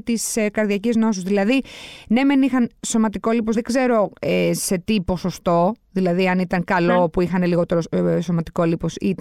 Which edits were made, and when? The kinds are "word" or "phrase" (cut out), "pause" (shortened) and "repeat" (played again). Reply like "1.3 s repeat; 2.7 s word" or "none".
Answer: 3.5 s phrase